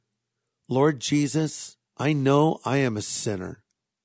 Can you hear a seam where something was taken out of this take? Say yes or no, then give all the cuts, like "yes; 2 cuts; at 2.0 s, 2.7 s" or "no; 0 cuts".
yes; 1 cut; at 1.9 s